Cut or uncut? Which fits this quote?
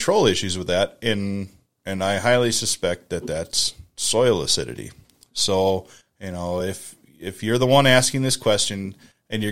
uncut